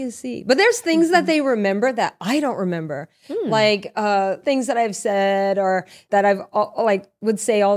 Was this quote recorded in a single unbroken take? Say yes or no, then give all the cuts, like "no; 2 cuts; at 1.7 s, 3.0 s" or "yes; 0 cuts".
no; 2 cuts; at 4.4 s, 6.1 s